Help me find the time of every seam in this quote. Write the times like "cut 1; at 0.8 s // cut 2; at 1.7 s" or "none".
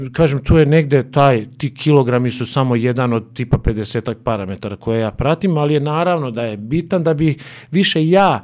none